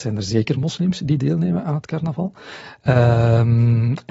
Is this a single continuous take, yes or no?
yes